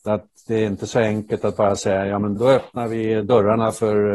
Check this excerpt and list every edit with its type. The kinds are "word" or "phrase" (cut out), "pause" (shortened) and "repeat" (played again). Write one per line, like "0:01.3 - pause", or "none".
0:02.4 - word